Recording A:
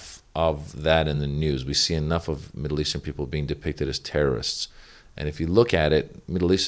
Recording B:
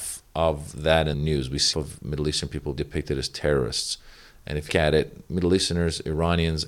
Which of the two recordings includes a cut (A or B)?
B